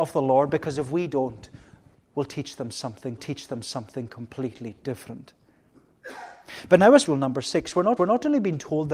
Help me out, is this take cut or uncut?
cut